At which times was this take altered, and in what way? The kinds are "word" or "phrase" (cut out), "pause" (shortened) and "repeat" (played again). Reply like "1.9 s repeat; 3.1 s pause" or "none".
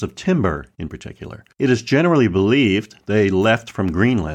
1.5 s pause